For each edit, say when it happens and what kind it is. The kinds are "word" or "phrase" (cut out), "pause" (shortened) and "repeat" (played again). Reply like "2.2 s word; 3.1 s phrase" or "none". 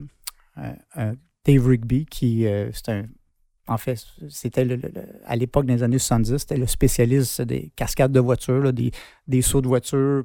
none